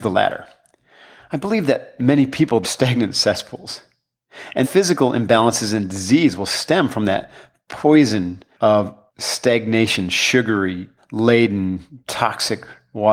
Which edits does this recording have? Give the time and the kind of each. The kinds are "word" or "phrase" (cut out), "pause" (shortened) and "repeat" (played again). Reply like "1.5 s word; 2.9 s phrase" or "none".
2.6 s phrase; 4.6 s word; 11.0 s word

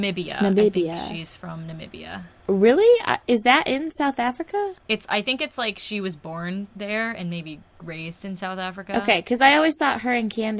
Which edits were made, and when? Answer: 2.4 s pause; 4.8 s pause

